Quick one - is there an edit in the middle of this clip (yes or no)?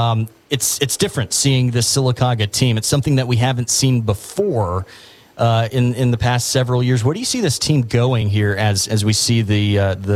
no